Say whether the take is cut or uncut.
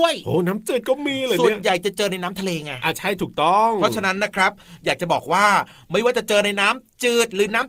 uncut